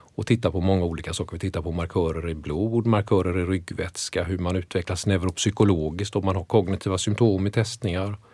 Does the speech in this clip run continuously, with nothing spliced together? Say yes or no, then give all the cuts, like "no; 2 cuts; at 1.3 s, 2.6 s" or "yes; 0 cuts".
yes; 0 cuts